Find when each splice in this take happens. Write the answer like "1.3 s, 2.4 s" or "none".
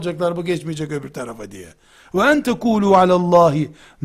none